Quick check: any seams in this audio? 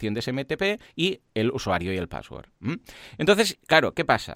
no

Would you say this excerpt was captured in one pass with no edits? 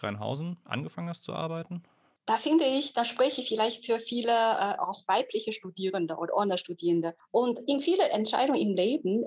yes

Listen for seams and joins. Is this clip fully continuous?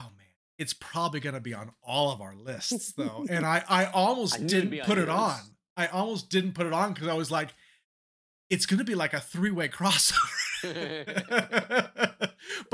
yes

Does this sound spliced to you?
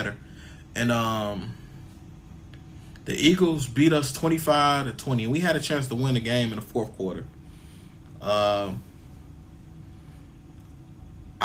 no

